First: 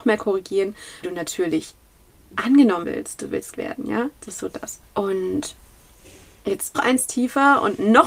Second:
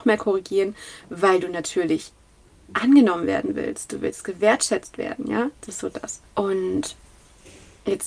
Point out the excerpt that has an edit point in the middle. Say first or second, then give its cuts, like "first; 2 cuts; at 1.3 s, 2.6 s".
first; 4 cuts; at 1.0 s, 2.8 s, 3.5 s, 6.7 s